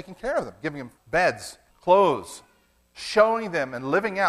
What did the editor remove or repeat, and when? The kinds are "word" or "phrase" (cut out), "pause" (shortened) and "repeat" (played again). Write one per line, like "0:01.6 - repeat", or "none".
0:01.0 - phrase
0:01.7 - pause